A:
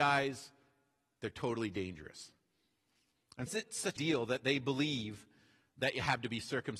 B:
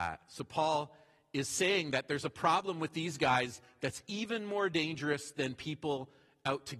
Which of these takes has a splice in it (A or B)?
A